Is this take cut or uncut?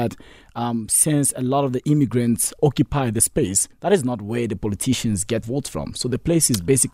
cut